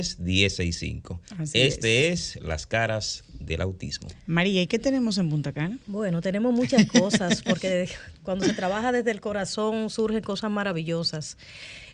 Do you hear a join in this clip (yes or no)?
yes